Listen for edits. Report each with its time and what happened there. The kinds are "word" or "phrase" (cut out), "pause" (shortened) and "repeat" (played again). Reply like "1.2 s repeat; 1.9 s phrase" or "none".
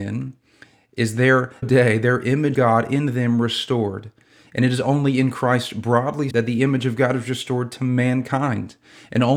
1.6 s word; 2.5 s word; 6.3 s word